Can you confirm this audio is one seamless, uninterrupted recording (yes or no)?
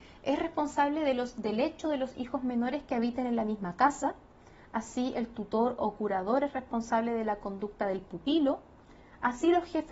yes